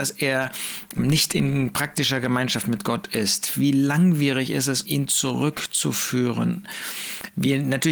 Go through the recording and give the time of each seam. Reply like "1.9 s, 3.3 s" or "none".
1.0 s, 4.8 s